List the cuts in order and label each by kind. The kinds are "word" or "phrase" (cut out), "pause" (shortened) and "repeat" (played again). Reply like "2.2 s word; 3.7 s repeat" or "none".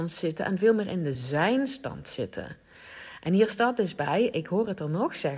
none